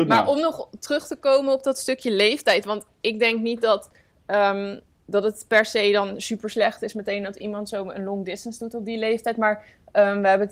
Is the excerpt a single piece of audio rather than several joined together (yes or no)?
yes